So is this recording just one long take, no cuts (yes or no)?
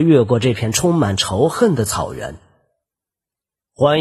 yes